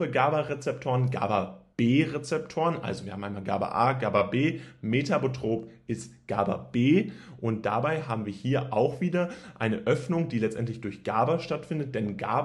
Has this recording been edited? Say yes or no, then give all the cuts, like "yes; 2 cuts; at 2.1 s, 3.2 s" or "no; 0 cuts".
yes; 1 cut; at 1.7 s